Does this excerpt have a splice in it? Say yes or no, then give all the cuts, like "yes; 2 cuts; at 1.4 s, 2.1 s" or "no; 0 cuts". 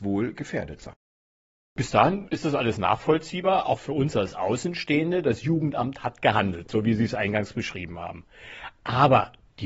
no; 0 cuts